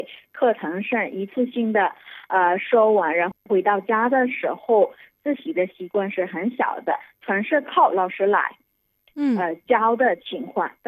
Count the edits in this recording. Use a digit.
0